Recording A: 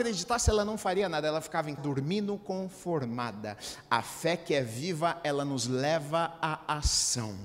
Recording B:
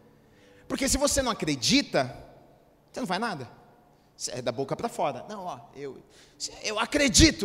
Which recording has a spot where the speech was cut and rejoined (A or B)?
A